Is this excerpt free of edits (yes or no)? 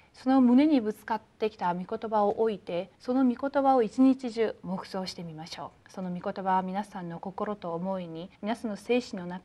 no